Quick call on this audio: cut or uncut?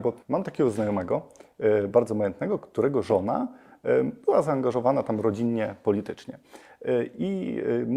uncut